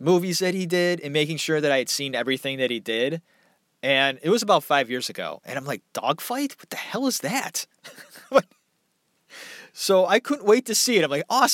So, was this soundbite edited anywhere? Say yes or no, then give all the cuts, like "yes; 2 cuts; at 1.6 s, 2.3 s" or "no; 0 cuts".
no; 0 cuts